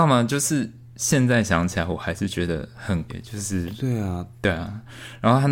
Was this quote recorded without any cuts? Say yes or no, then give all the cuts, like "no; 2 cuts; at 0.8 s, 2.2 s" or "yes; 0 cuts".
no; 1 cut; at 3.1 s